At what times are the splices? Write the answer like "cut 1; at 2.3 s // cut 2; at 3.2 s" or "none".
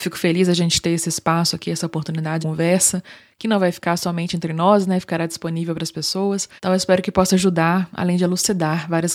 cut 1; at 2.4 s // cut 2; at 6.6 s